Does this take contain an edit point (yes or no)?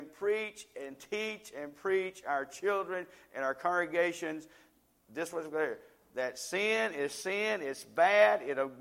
no